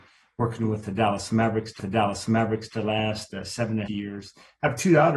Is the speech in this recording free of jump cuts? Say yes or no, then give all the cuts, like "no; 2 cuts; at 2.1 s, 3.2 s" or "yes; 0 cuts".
no; 2 cuts; at 1.8 s, 3.9 s